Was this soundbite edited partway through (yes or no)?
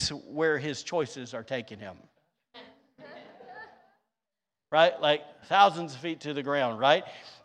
no